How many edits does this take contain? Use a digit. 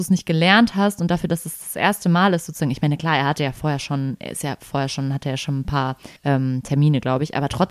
1